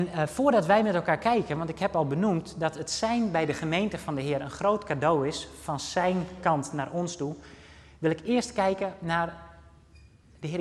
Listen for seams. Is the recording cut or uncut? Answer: uncut